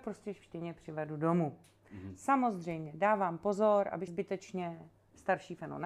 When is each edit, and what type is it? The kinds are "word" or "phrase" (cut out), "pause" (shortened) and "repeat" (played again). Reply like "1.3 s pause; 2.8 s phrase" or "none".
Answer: 4.1 s word